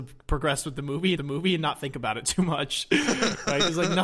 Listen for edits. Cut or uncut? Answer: cut